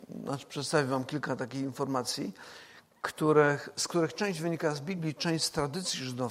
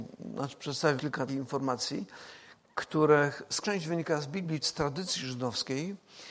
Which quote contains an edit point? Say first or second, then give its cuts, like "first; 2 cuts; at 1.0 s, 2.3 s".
second; 4 cuts; at 1.0 s, 1.3 s, 3.6 s, 4.6 s